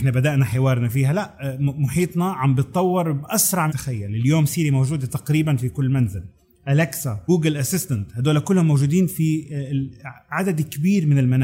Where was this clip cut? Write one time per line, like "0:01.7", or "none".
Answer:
0:03.7
0:06.4